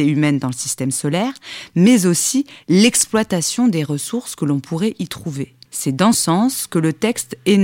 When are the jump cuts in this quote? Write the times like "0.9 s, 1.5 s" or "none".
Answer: 5.7 s, 6.1 s